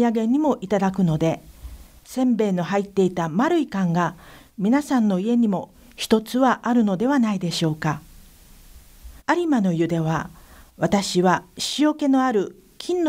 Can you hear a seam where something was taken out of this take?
yes; 1 cut; at 9.2 s

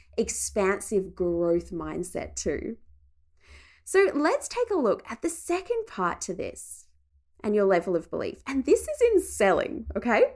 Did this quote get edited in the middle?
no; 0 cuts

